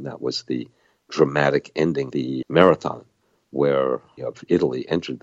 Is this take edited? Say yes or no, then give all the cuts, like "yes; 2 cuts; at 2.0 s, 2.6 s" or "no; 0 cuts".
yes; 3 cuts; at 2.1 s, 2.4 s, 4.2 s